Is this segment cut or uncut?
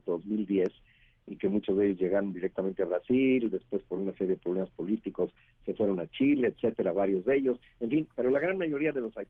uncut